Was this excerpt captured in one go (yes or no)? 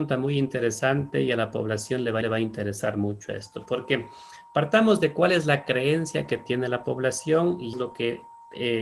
no